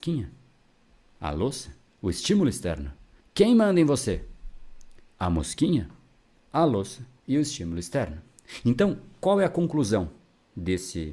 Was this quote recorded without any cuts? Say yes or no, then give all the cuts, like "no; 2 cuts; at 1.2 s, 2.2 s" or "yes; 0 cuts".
no; 4 cuts; at 1.9 s, 3.2 s, 5.1 s, 7.2 s